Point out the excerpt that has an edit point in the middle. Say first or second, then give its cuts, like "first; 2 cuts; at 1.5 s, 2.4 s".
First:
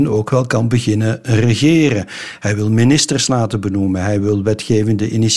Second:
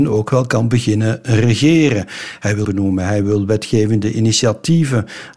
second; 1 cut; at 2.6 s